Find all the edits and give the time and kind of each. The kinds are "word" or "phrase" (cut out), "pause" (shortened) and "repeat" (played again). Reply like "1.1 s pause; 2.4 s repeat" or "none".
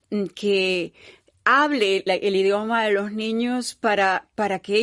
2.1 s word

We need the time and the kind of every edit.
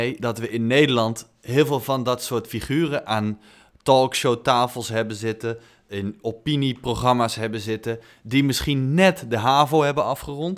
none

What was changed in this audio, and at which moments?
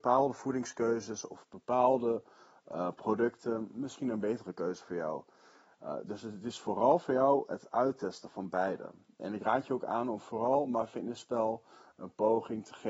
none

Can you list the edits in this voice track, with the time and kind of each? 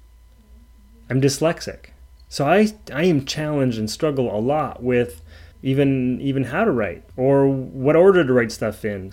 5.5 s pause; 7.1 s pause

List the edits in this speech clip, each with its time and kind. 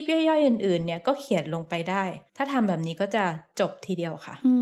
2.3 s pause

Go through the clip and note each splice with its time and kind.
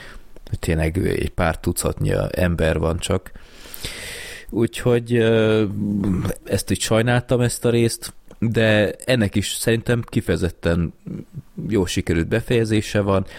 6.4 s word

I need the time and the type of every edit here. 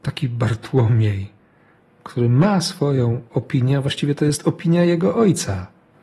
none

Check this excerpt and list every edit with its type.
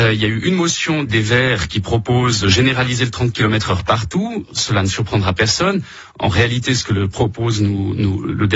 1.1 s word; 1.7 s word; 2.4 s word

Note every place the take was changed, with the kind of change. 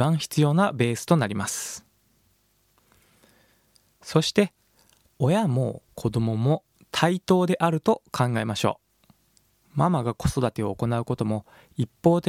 none

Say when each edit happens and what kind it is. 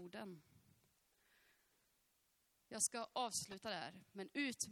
none

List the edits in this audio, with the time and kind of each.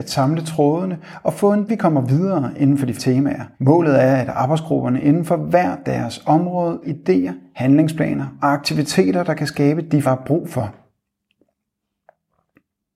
1.7 s phrase; 3.0 s word; 3.5 s pause; 6.8 s word; 10.0 s word

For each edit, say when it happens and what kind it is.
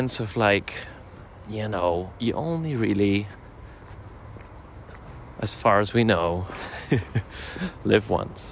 none

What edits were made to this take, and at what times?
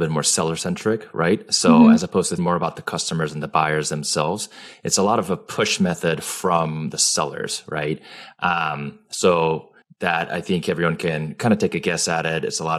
2.4 s word; 9.8 s pause

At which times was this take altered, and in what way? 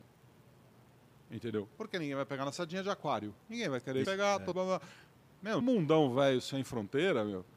2.5 s word; 4.0 s word; 4.5 s word; 5.6 s word

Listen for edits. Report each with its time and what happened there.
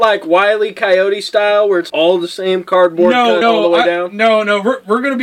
1.9 s word; 3.4 s word

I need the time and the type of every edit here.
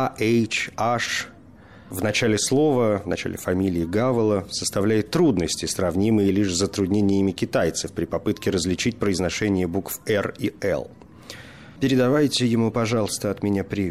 none

